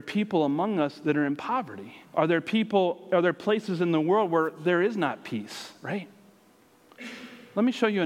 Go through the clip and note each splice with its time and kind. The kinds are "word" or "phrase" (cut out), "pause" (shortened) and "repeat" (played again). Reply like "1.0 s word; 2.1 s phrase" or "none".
2.0 s pause